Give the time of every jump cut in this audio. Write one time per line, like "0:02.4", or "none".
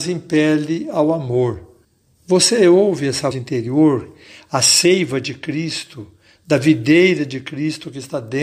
0:01.8
0:03.3